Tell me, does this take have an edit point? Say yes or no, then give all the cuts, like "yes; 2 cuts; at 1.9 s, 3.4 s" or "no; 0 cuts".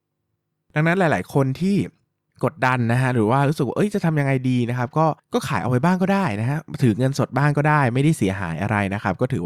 no; 0 cuts